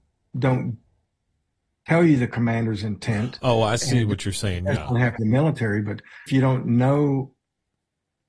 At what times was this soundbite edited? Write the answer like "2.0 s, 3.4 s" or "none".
4.8 s, 5.2 s, 6.3 s